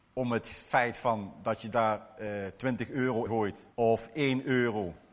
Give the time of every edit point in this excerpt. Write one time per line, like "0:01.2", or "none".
0:03.3
0:03.7